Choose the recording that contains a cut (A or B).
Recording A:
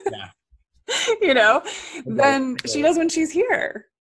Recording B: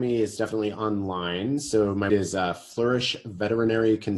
B